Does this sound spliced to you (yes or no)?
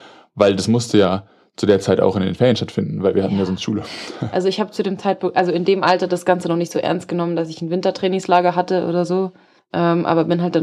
no